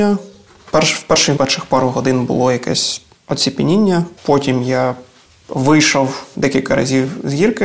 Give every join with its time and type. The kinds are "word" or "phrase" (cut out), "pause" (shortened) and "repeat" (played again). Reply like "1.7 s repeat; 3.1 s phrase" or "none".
1.4 s word; 3.2 s word; 4.2 s pause; 6.3 s word